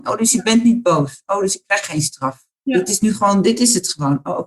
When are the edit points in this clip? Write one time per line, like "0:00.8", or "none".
none